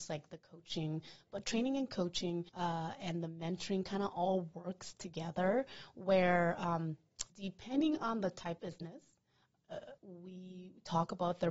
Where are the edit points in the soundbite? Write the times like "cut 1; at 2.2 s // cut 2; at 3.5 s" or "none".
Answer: cut 1; at 2.5 s // cut 2; at 7.3 s // cut 3; at 8.6 s // cut 4; at 10.0 s